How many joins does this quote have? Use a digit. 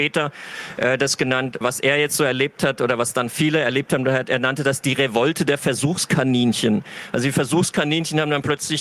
1